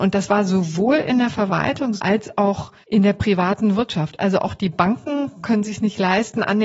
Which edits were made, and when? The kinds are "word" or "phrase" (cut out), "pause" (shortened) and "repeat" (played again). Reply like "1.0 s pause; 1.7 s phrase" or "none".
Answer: 2.0 s word; 2.8 s pause

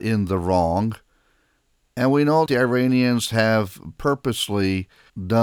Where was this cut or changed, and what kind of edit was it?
2.5 s word

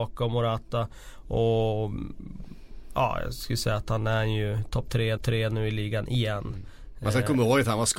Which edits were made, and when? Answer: 5.2 s repeat

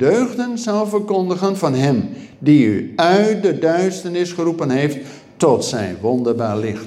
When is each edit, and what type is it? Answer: none

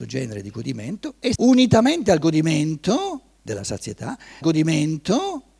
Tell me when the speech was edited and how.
1.3 s word; 4.4 s repeat

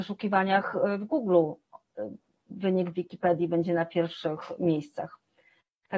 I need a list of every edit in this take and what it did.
none

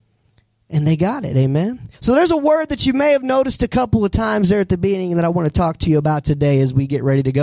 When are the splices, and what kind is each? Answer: 1.9 s pause

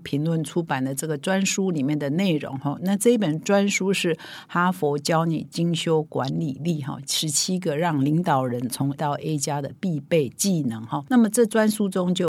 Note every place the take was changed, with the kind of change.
9.0 s word

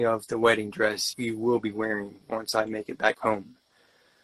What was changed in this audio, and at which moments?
1.1 s word; 2.2 s pause

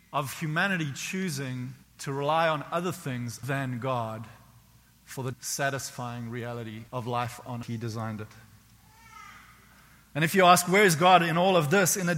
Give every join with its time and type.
1.8 s pause; 3.4 s word; 5.3 s word; 6.9 s pause; 7.6 s phrase

